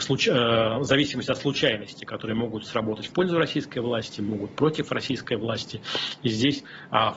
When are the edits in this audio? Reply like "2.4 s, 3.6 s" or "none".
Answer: none

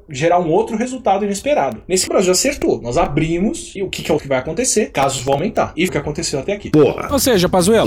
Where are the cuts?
2.1 s, 3.8 s, 4.2 s, 5.9 s

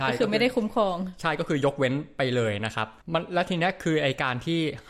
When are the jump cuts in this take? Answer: 3.0 s

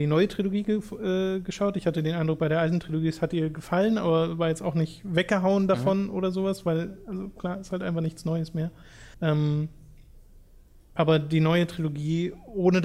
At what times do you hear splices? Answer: 9.1 s

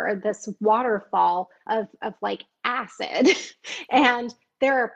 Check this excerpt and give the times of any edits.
none

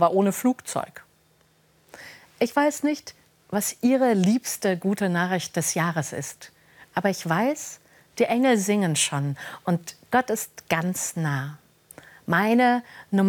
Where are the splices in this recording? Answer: none

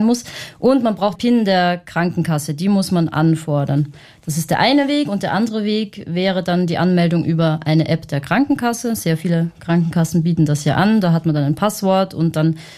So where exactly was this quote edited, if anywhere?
1.2 s

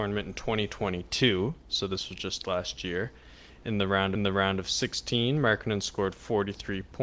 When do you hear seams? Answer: 4.2 s

